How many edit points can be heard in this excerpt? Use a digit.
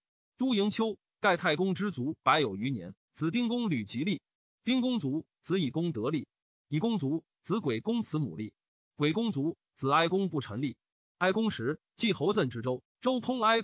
0